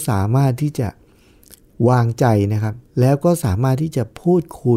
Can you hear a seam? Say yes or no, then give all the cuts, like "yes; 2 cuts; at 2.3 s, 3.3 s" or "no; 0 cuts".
yes; 1 cut; at 2.9 s